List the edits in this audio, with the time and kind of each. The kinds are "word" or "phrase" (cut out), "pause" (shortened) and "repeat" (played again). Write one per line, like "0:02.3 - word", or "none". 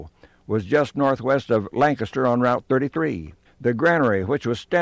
0:03.4 - pause